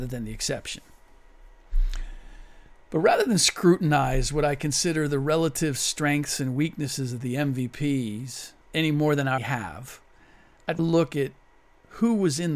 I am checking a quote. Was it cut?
yes; 3 cuts; at 8.6 s, 9.4 s, 10.8 s

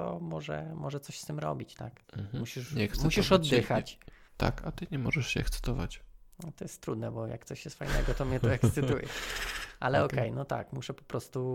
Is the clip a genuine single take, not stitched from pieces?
no; 2 cuts; at 2.0 s, 4.3 s

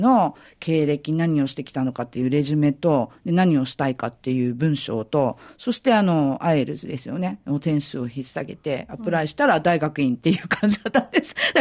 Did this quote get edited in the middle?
no; 0 cuts

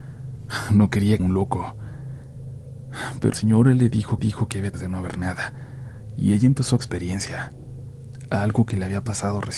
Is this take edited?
yes; 5 cuts; at 1.2 s, 3.3 s, 4.2 s, 4.7 s, 6.8 s

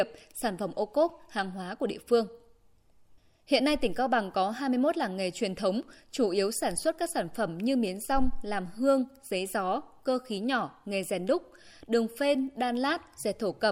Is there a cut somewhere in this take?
no; 0 cuts

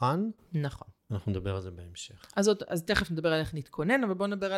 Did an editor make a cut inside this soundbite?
yes; 1 cut; at 1.0 s

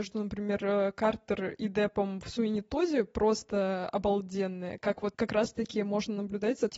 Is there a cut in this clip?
no; 0 cuts

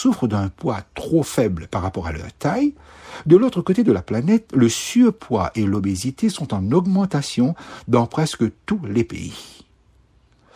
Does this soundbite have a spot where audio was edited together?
no; 0 cuts

